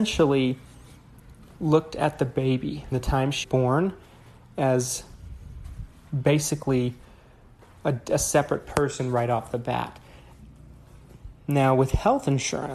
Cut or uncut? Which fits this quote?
cut